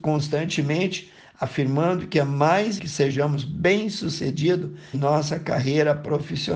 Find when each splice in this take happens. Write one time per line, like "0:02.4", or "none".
0:02.8
0:04.9